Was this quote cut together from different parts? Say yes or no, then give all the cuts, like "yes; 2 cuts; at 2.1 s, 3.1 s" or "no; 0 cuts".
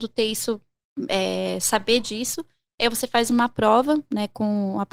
no; 0 cuts